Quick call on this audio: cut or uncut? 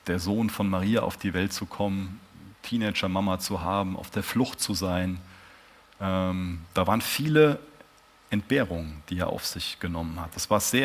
uncut